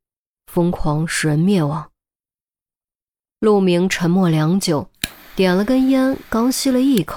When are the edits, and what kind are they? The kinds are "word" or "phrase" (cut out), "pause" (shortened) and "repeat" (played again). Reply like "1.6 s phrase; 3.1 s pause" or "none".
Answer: none